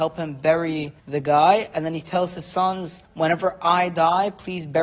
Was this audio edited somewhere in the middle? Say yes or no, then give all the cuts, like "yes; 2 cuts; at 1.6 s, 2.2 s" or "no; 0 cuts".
yes; 2 cuts; at 1.0 s, 3.1 s